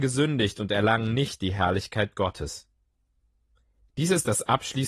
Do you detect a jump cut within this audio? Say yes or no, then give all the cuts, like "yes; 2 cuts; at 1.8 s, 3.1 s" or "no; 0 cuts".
no; 0 cuts